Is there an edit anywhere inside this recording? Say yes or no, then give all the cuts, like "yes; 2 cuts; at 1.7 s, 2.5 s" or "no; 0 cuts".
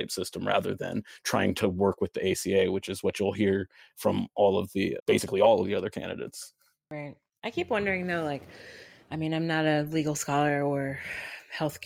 yes; 1 cut; at 5.0 s